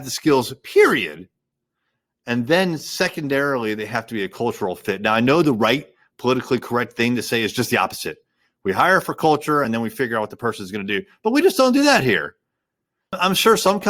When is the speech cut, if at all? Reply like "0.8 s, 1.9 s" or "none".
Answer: none